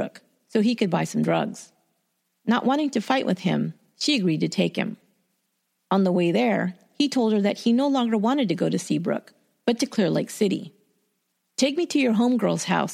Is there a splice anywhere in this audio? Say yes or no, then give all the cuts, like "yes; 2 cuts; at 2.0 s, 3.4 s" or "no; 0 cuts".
no; 0 cuts